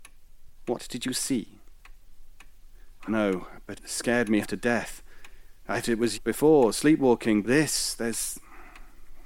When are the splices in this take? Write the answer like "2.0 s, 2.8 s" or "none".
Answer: 3.1 s, 3.7 s, 4.4 s, 5.8 s, 6.1 s, 7.4 s

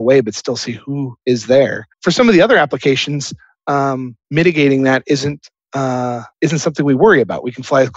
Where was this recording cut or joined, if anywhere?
1.2 s, 1.9 s, 4.2 s, 6.3 s

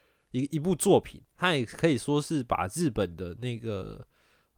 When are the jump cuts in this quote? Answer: 1.3 s

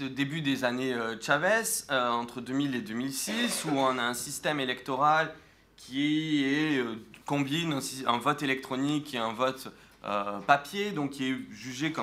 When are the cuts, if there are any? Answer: 7.2 s

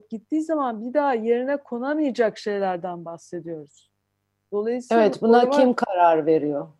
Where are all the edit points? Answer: none

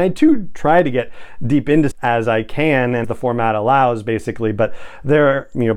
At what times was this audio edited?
1.9 s, 3.0 s

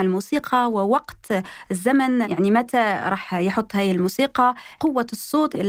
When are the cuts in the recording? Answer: none

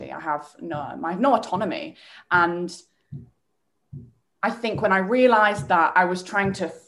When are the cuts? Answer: none

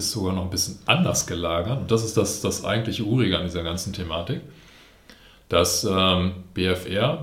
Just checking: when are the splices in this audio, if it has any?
none

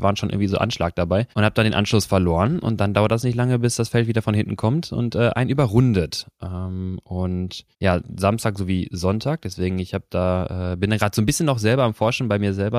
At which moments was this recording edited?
1.3 s, 7.7 s

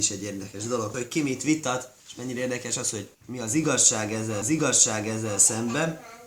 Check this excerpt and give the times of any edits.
0.9 s, 2.0 s, 3.1 s, 4.4 s

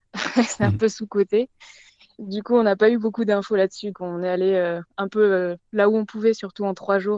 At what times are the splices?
3.9 s

